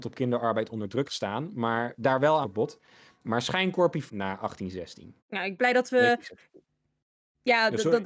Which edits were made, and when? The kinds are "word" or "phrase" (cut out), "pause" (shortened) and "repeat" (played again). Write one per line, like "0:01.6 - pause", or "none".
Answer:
0:01.1 - word
0:02.0 - word
0:02.4 - phrase
0:04.1 - word
0:05.2 - pause
0:05.6 - phrase